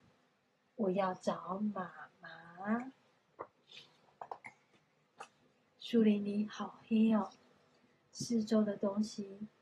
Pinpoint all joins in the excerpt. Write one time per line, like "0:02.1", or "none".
none